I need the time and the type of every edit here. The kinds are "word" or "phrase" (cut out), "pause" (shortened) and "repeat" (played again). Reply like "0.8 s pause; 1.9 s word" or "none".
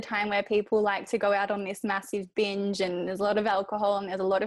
none